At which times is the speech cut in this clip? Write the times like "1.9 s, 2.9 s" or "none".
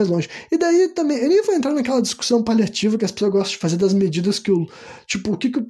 none